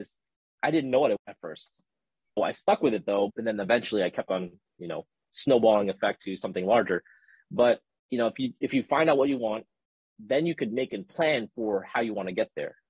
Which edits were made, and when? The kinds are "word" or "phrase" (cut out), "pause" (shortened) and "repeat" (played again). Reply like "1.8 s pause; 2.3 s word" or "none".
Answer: 1.2 s word; 2.4 s word; 3.3 s word